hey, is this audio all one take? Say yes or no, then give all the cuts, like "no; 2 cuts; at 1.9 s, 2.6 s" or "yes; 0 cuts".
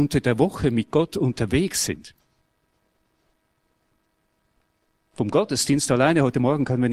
yes; 0 cuts